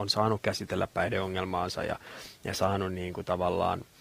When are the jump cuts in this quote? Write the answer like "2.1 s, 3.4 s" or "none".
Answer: none